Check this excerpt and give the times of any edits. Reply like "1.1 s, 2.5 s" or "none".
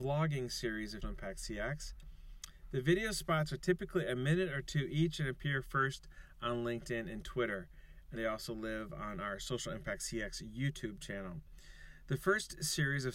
1.0 s, 8.2 s